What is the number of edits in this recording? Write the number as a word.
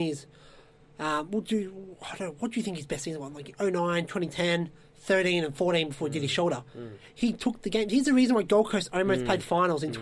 one